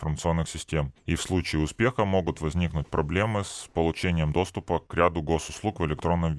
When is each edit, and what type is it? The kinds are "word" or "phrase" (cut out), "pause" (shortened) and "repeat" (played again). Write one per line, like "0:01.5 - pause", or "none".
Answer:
none

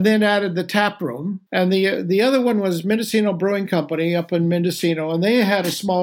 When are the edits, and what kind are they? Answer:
0:01.5 - pause

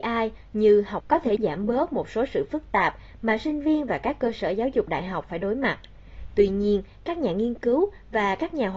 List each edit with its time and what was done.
0:01.0 - word
0:01.4 - word

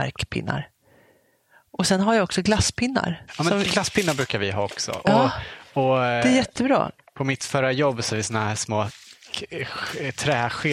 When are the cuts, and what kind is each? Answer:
0:08.1 - word

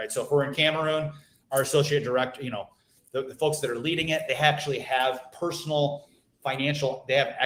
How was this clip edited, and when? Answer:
none

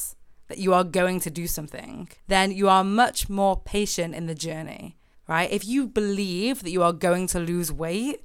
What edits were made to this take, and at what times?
0:02.2 - pause
0:05.1 - pause

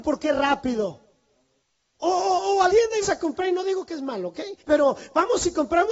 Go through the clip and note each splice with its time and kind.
0:01.6 - pause
0:02.7 - word
0:03.0 - word
0:04.6 - pause

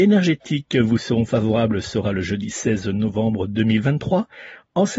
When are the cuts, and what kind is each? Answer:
none

